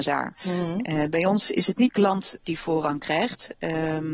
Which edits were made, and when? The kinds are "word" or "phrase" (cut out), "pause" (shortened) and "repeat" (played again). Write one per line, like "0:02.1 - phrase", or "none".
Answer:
0:01.9 - word